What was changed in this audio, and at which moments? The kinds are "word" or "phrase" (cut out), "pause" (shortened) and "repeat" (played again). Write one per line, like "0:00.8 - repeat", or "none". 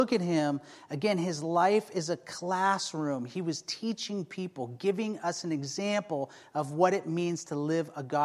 none